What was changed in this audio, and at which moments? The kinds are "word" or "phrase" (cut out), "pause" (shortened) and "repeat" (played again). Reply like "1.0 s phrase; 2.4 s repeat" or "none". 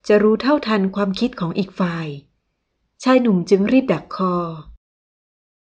none